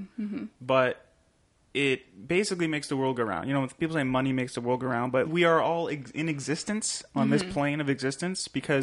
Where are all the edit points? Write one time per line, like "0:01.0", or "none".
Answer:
0:05.2